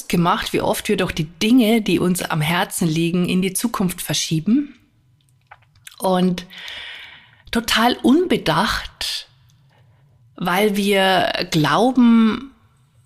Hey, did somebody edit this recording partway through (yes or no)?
no